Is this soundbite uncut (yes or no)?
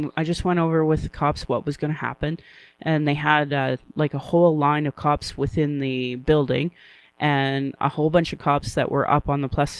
yes